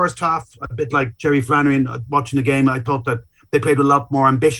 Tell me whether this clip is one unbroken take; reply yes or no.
yes